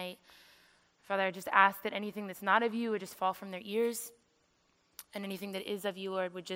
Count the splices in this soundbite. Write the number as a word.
zero